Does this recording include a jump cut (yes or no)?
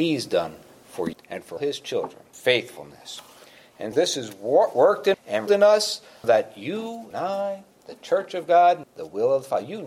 yes